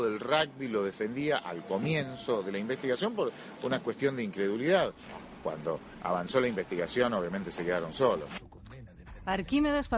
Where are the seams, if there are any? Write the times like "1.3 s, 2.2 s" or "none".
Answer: none

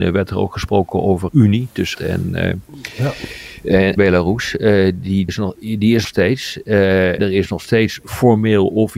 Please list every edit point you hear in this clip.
1.3 s, 1.9 s, 4.0 s, 5.3 s, 6.0 s, 7.2 s

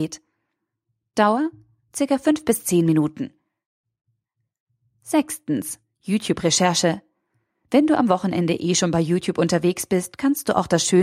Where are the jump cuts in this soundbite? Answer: none

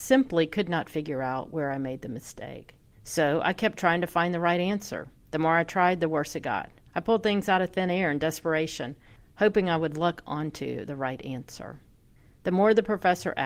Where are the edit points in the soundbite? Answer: none

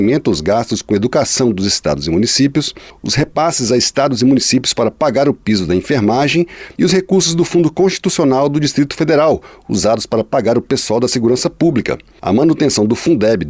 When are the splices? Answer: none

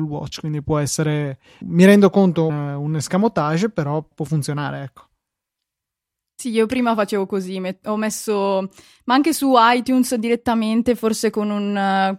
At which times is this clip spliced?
1.6 s, 2.5 s, 4.1 s

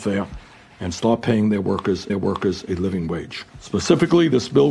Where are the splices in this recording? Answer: 2.1 s, 3.5 s

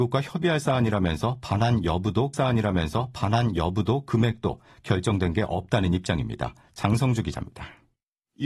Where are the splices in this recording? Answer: 2.3 s

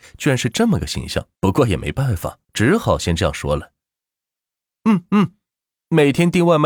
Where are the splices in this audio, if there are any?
1.4 s, 2.4 s

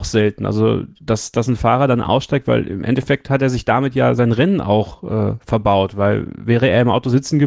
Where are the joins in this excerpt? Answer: none

